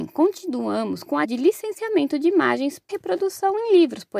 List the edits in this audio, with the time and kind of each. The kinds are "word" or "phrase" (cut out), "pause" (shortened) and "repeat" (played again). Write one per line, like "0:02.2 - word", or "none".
0:01.2 - word
0:02.9 - word